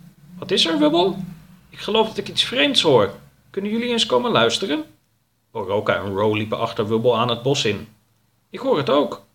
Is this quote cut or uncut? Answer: uncut